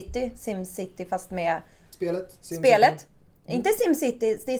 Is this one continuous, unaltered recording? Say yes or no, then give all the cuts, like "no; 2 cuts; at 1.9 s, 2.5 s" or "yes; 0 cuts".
yes; 0 cuts